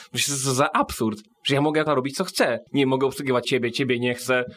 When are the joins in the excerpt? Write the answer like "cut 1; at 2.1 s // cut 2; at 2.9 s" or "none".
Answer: cut 1; at 1.3 s // cut 2; at 1.9 s // cut 3; at 2.7 s // cut 4; at 3.4 s